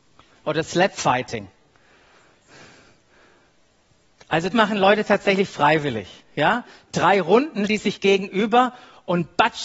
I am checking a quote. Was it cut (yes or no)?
yes